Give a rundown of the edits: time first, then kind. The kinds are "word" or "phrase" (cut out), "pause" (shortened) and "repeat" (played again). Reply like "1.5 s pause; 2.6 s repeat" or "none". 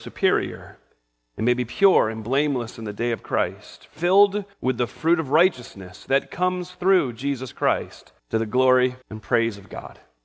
4.5 s pause; 8.2 s pause; 9.0 s pause